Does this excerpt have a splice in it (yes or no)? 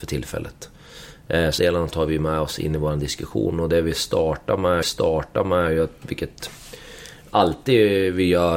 yes